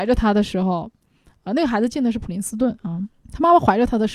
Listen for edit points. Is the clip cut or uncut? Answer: cut